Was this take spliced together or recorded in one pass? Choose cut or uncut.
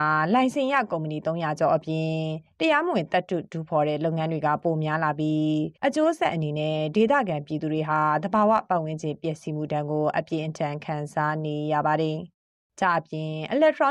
cut